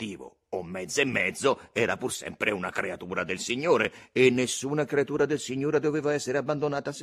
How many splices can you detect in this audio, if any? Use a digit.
0